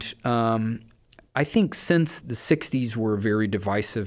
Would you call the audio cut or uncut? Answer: cut